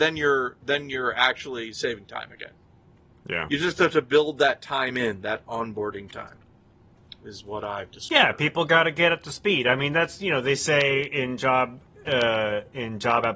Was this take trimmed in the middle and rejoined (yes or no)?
no